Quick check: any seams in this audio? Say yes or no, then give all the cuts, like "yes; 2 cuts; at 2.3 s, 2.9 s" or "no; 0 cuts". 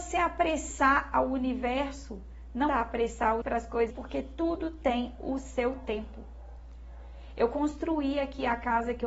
yes; 3 cuts; at 2.7 s, 3.4 s, 3.9 s